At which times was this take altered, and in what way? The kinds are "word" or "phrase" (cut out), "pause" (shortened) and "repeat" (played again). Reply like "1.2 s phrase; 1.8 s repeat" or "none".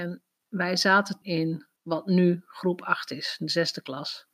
1.2 s word; 1.8 s pause